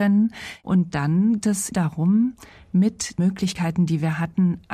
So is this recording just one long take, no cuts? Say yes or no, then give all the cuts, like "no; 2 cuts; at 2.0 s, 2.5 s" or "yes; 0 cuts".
no; 3 cuts; at 1.4 s, 1.7 s, 3.2 s